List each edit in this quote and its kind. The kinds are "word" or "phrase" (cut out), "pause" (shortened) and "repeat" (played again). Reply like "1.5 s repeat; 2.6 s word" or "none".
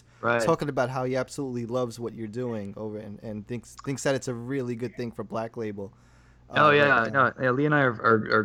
none